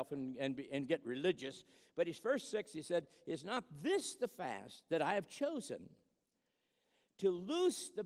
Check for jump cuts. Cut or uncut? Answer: uncut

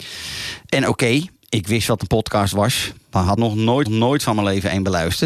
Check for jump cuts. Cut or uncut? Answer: cut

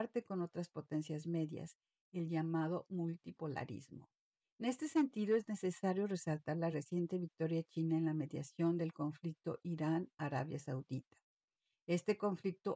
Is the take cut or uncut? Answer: uncut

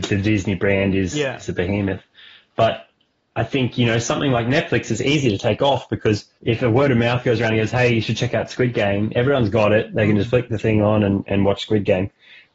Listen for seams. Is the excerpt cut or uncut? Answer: cut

